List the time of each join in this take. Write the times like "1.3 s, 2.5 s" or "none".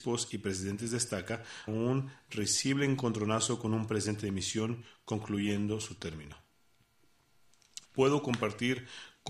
1.7 s, 7.8 s